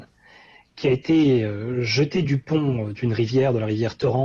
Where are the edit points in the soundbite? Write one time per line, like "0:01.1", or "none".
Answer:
none